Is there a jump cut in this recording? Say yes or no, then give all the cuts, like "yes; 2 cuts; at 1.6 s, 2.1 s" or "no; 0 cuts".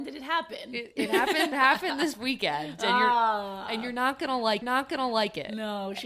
yes; 4 cuts; at 0.9 s, 1.5 s, 2.1 s, 4.6 s